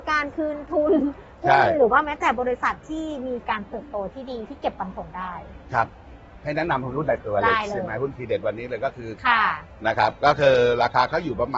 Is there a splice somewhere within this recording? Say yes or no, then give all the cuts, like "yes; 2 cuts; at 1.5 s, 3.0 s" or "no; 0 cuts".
yes; 1 cut; at 9.2 s